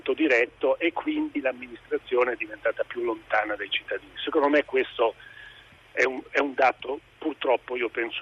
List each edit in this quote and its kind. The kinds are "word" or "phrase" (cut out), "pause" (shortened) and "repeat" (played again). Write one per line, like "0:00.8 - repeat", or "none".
none